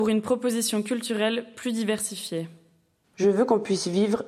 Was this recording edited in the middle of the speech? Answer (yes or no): no